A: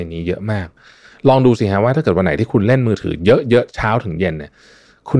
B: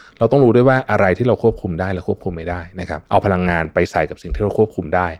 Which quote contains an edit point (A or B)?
B